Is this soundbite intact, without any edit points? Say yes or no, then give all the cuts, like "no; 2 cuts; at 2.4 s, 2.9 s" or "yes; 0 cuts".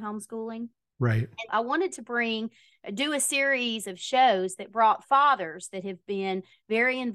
no; 1 cut; at 1.5 s